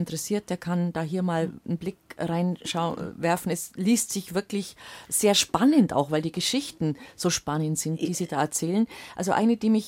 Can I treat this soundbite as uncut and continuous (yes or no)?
yes